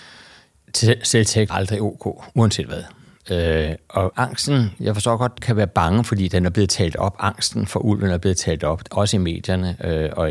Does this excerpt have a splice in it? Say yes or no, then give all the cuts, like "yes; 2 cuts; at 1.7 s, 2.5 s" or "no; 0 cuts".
yes; 3 cuts; at 1.5 s, 4.1 s, 5.4 s